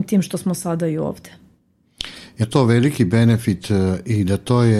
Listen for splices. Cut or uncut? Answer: cut